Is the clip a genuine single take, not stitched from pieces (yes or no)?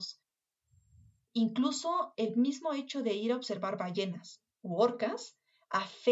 no